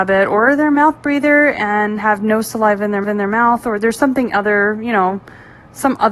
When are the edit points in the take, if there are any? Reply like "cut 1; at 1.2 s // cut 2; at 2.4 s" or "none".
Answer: cut 1; at 3.0 s